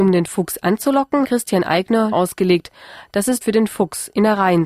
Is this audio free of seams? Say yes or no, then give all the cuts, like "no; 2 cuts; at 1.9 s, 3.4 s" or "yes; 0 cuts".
no; 3 cuts; at 1.2 s, 2.1 s, 3.4 s